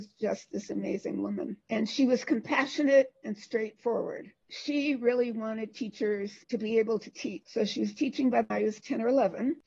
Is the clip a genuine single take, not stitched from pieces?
no; 1 cut; at 8.5 s

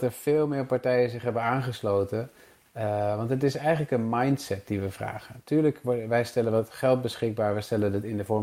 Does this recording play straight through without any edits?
yes; 0 cuts

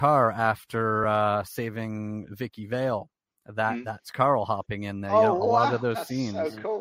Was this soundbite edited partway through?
no; 0 cuts

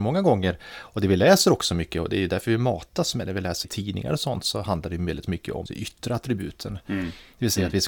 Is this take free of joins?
no; 2 cuts; at 3.6 s, 5.7 s

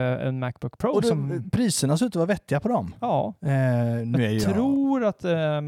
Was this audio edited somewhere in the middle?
no; 0 cuts

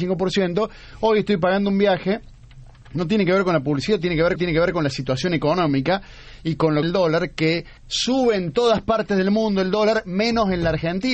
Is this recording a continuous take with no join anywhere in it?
no; 3 cuts; at 4.4 s, 6.8 s, 7.8 s

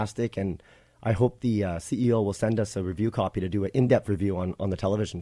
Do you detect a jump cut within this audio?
no; 0 cuts

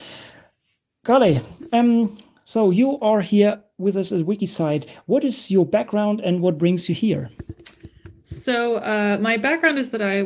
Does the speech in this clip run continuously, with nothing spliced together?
yes; 0 cuts

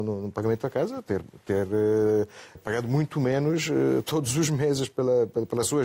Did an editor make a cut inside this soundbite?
yes; 1 cut; at 2.6 s

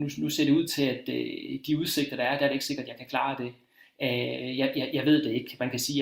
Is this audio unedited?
yes; 0 cuts

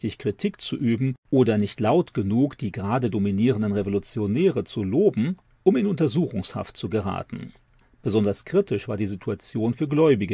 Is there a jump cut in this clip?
no; 0 cuts

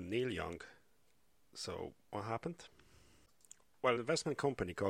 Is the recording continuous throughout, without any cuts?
no; 1 cut; at 4.0 s

